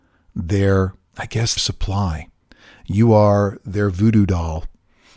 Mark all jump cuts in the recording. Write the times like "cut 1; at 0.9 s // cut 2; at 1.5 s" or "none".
cut 1; at 1.1 s // cut 2; at 1.6 s // cut 3; at 2.4 s